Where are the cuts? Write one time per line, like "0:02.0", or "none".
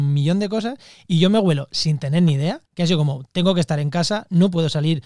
0:02.7

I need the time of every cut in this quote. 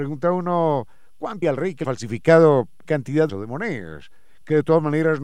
0:01.4
0:01.8
0:02.9
0:03.3

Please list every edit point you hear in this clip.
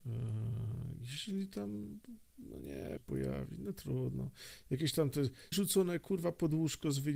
0:03.0
0:05.5

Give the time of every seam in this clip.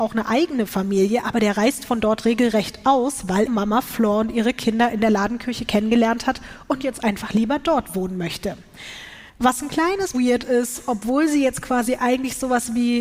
0:03.5
0:09.3
0:10.1

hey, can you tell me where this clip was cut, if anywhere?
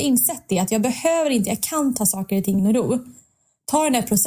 0:02.6

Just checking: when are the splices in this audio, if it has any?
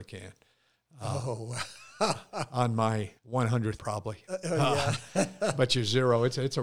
0:03.2
0:03.8

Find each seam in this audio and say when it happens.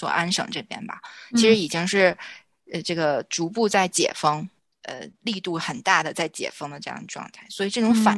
none

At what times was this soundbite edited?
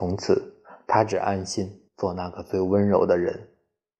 0:01.9

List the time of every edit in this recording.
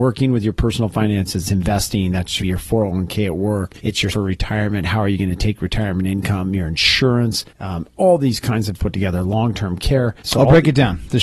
0:01.4
0:02.4
0:03.8
0:04.1
0:07.5
0:08.8
0:10.2

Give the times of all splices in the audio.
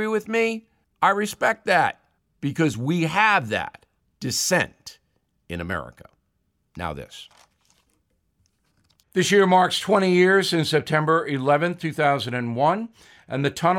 none

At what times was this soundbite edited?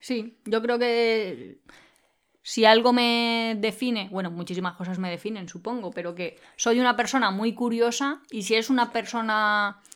none

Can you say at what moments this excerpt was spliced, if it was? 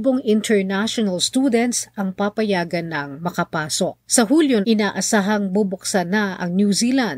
0:04.0
0:04.6

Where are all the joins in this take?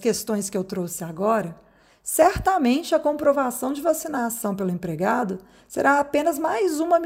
none

